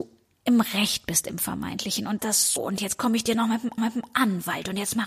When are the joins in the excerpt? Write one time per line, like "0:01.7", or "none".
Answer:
0:02.2
0:02.6
0:03.8